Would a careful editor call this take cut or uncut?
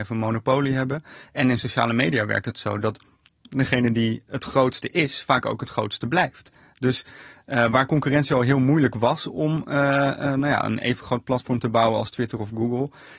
uncut